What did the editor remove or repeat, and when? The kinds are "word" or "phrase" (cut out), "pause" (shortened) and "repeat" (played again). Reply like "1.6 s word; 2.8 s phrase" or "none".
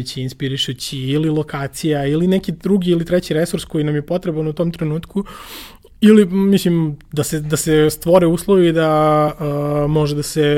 none